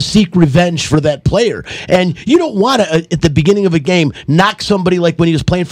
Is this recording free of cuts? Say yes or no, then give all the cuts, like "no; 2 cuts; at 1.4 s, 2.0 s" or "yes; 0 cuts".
yes; 0 cuts